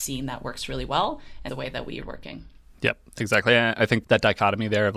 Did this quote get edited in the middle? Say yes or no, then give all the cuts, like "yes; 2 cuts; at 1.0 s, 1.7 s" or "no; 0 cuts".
yes; 3 cuts; at 1.5 s, 2.0 s, 4.0 s